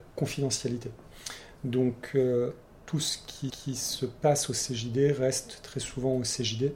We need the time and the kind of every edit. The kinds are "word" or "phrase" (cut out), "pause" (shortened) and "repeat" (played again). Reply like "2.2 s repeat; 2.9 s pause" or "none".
3.5 s repeat